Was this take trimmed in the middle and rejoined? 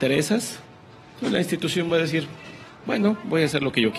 no; 0 cuts

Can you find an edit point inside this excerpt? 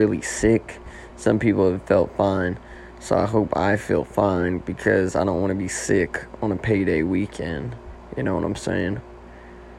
no; 0 cuts

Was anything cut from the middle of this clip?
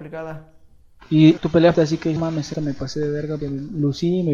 yes; 5 cuts; at 1.4 s, 1.7 s, 2.2 s, 2.5 s, 3.4 s

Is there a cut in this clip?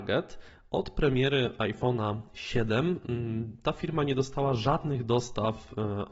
no; 0 cuts

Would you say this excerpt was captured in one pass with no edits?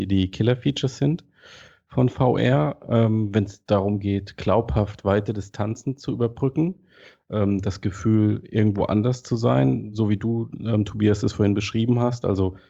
yes; 0 cuts

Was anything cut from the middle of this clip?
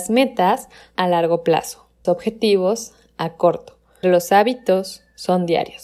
yes; 3 cuts; at 0.9 s, 2.0 s, 4.0 s

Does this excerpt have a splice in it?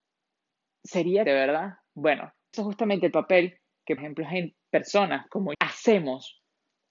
yes; 4 cuts; at 1.2 s, 2.5 s, 4.0 s, 5.5 s

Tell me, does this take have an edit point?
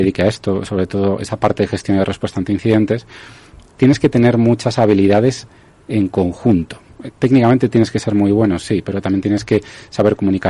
no; 0 cuts

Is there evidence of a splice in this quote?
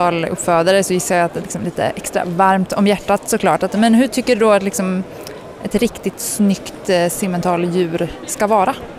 yes; 1 cut; at 1.4 s

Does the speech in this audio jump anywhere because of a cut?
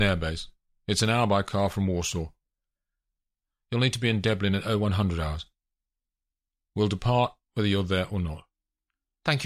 no; 0 cuts

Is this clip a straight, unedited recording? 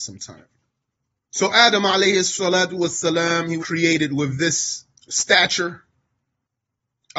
no; 1 cut; at 3.6 s

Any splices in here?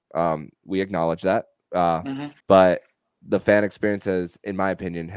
yes; 1 cut; at 2.4 s

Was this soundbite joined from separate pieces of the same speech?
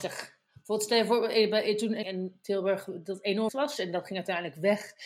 yes; 2 cuts; at 2.0 s, 3.5 s

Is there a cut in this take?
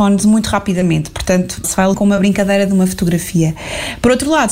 yes; 2 cuts; at 1.6 s, 1.9 s

